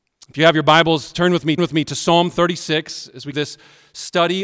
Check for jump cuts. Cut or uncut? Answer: cut